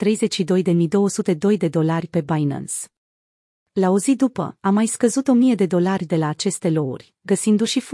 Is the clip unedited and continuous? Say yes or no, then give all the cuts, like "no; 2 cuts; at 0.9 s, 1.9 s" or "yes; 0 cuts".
yes; 0 cuts